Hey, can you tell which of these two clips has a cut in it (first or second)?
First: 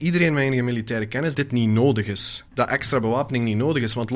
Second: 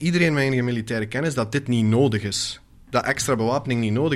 first